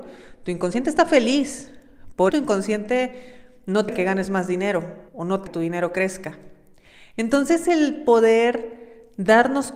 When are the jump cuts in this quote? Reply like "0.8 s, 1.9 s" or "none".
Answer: 2.3 s, 3.9 s, 5.1 s, 5.5 s